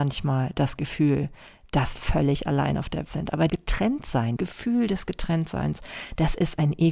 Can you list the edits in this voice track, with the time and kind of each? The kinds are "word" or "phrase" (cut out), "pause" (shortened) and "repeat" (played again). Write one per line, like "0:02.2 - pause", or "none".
0:02.0 - word
0:03.0 - word
0:03.5 - word
0:04.4 - word